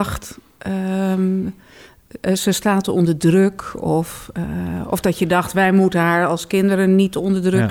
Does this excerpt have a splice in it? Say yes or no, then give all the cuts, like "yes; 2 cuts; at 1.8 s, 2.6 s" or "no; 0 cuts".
no; 0 cuts